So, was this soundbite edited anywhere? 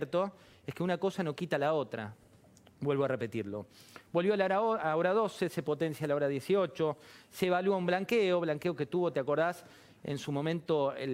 no; 0 cuts

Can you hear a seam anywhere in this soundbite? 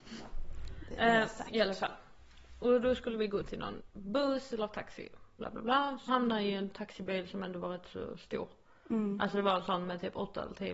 yes; 1 cut; at 6.1 s

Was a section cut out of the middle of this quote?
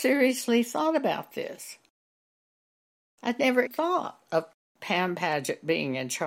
yes; 1 cut; at 3.7 s

